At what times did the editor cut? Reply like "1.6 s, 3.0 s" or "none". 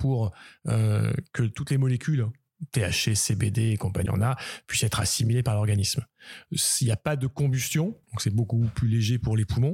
4.1 s, 8.0 s